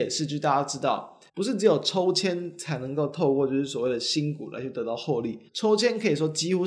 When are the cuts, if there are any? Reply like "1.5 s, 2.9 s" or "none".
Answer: 1.3 s, 5.5 s